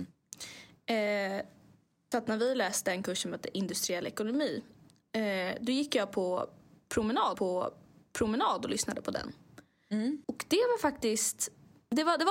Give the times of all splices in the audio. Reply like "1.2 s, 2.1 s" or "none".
2.1 s, 7.3 s, 10.2 s